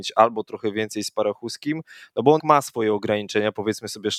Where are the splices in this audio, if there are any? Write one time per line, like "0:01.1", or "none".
0:02.4